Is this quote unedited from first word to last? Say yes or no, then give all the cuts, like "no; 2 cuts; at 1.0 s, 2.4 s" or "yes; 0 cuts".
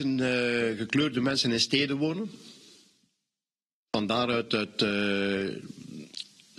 yes; 0 cuts